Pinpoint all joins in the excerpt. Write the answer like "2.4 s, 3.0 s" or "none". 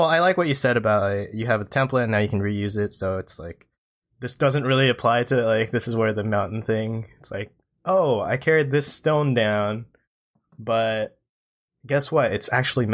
none